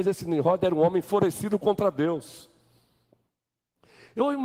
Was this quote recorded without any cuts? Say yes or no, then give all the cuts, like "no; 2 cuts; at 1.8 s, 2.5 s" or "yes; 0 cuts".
yes; 0 cuts